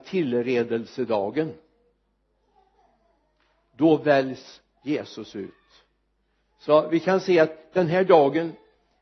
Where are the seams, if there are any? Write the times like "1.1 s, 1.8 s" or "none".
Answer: none